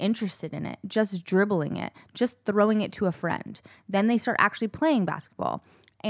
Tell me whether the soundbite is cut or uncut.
uncut